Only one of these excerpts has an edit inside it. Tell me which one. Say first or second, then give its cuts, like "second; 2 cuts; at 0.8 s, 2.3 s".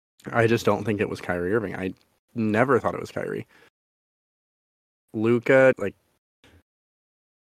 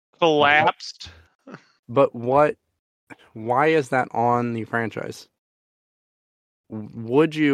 first; 1 cut; at 5.7 s